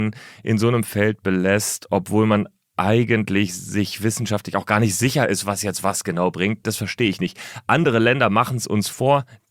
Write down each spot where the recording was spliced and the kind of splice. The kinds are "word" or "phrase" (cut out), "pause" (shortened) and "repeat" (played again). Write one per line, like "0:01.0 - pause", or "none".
none